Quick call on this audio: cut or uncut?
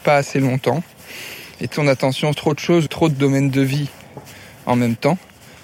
cut